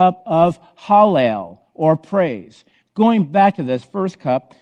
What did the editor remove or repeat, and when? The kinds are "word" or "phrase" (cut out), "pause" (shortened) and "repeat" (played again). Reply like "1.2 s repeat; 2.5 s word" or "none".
none